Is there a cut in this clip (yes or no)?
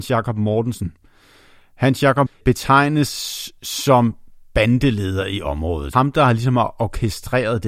yes